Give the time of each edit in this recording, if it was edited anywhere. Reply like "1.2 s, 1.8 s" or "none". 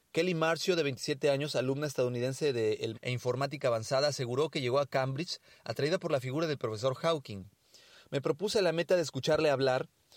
2.9 s